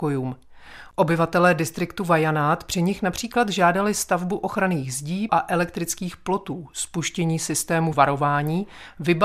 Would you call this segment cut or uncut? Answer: cut